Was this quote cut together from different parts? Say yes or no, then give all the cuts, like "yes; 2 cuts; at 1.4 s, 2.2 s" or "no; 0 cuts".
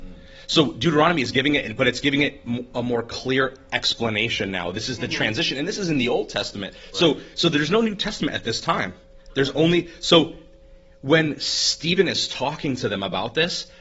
no; 0 cuts